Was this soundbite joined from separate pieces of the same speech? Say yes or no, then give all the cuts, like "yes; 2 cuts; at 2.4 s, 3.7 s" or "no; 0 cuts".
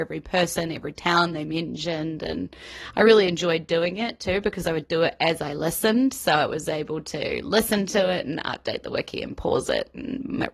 no; 0 cuts